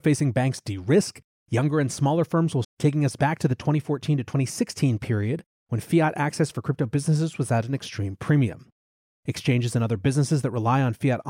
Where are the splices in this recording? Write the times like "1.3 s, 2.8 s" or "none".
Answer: 2.6 s